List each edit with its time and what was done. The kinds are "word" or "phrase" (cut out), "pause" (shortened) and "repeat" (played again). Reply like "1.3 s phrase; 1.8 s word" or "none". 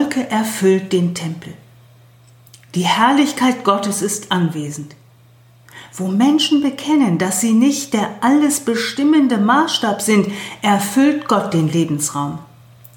none